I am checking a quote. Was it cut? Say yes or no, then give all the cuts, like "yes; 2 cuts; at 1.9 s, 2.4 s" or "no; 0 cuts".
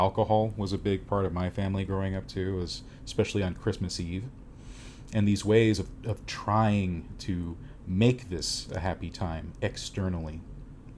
no; 0 cuts